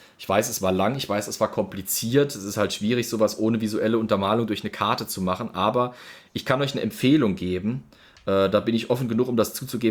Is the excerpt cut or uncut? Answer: uncut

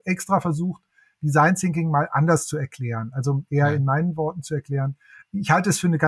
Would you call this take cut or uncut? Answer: uncut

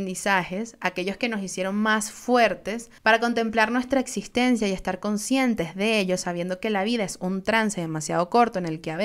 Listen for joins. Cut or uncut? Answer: cut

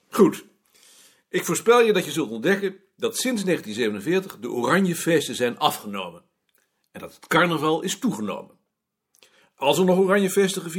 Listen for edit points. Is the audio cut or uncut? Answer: uncut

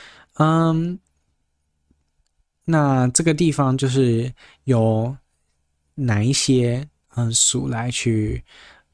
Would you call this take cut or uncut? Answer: uncut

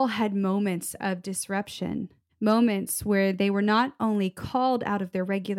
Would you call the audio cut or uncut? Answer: cut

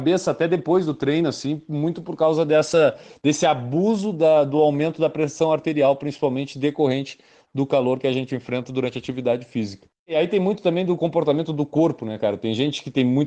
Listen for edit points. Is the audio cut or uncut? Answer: uncut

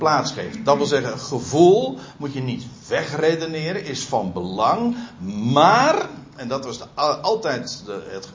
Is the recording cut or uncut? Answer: uncut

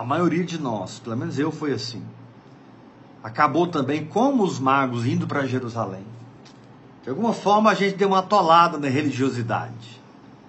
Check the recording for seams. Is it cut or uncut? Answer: uncut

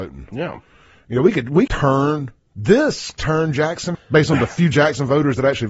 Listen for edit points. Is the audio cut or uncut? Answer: cut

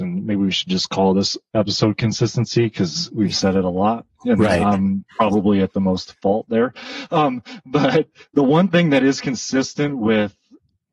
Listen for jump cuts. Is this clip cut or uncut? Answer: uncut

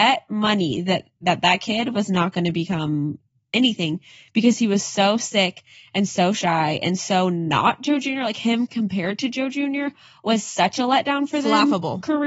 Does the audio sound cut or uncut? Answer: uncut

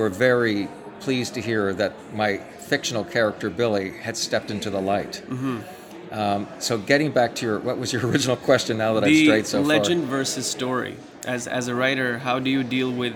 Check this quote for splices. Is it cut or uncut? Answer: uncut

